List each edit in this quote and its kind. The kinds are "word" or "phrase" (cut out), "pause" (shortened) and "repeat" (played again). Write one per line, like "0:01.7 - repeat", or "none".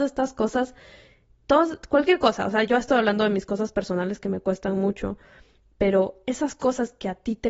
none